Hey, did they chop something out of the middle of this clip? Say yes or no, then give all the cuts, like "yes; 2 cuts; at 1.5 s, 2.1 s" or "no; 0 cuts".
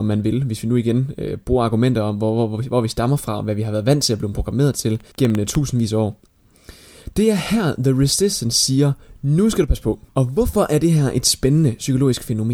yes; 2 cuts; at 5.1 s, 10.1 s